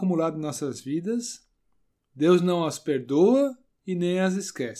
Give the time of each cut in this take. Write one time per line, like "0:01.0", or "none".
none